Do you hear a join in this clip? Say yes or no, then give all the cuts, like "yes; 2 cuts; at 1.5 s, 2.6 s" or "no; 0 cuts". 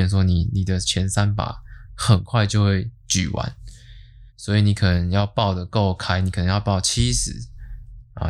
yes; 1 cut; at 4.3 s